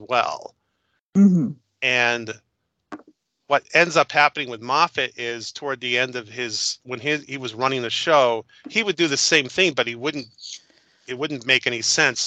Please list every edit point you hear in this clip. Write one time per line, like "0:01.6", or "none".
none